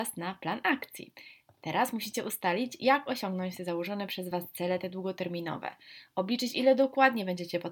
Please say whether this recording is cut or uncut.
uncut